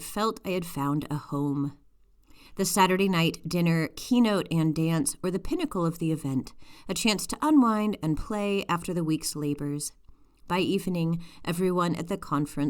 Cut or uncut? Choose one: cut